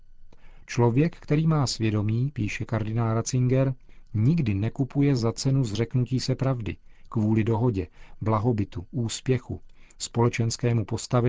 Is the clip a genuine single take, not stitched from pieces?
yes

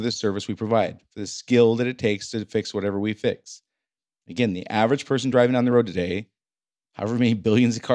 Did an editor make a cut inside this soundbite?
no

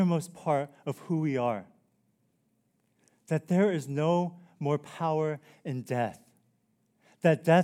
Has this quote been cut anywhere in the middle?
no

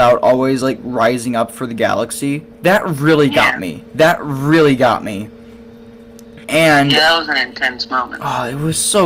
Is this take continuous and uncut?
no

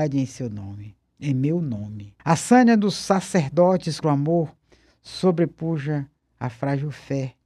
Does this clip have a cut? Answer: yes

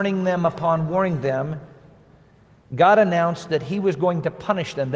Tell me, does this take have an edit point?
no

